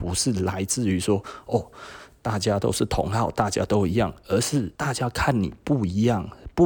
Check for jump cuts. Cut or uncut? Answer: cut